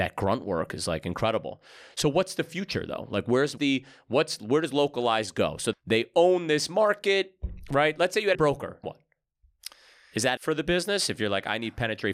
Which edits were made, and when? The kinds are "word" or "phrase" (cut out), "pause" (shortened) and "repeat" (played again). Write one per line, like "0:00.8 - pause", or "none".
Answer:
0:03.6 - word
0:05.7 - word
0:08.3 - word
0:08.8 - word
0:10.4 - word

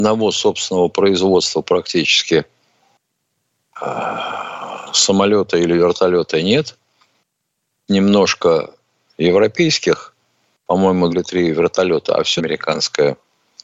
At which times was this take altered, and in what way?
0:07.9 - word
0:11.1 - word
0:12.4 - word

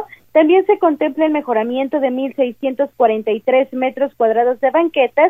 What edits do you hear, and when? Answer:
none

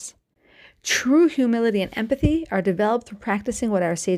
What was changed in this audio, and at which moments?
none

